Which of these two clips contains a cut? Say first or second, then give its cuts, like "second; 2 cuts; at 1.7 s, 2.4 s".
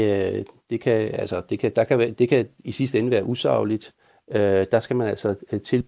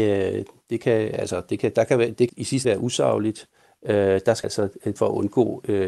second; 4 cuts; at 2.3 s, 2.6 s, 4.4 s, 5.0 s